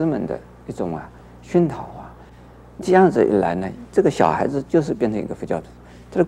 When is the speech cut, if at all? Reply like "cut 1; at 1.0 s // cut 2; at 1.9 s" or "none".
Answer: none